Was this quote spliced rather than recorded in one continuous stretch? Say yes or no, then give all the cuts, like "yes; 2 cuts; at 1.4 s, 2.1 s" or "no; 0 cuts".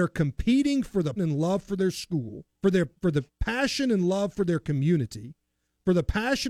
yes; 4 cuts; at 1.2 s, 2.5 s, 2.9 s, 3.3 s